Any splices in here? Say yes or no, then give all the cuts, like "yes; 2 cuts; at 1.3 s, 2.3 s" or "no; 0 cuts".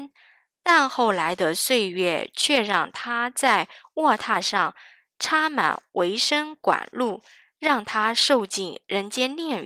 no; 0 cuts